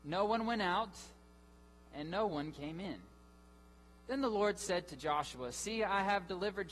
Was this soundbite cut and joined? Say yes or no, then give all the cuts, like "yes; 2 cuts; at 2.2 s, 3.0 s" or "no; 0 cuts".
no; 0 cuts